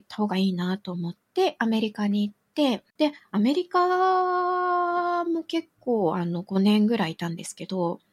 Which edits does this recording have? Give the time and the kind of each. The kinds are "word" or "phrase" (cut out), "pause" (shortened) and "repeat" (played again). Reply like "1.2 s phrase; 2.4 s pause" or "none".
2.9 s pause